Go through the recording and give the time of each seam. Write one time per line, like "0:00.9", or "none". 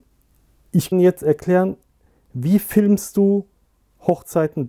0:00.9